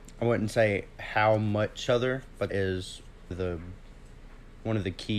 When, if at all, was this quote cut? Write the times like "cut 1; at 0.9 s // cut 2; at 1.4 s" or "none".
cut 1; at 1.9 s // cut 2; at 2.5 s // cut 3; at 3.3 s